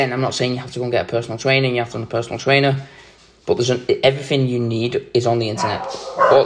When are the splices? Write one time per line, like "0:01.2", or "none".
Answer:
0:01.9